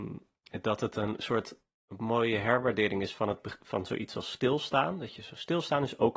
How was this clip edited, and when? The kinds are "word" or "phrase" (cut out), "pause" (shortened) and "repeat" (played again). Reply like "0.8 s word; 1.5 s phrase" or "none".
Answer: none